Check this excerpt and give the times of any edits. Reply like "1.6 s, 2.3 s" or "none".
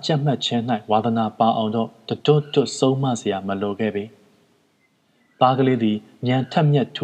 none